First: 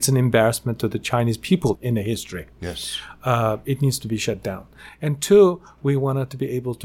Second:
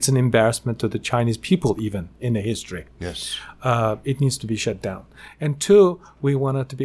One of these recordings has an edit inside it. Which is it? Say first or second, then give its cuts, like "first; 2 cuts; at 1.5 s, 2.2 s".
first; 1 cut; at 1.7 s